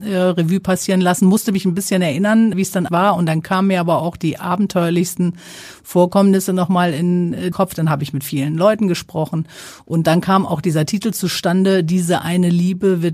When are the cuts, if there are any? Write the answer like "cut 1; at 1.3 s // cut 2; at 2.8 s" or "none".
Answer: cut 1; at 2.5 s // cut 2; at 2.9 s // cut 3; at 7.5 s